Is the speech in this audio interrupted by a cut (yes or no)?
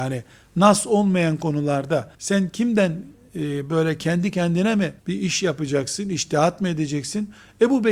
yes